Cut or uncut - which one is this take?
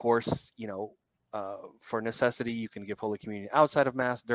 uncut